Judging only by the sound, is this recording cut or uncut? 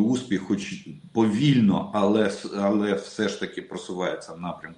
uncut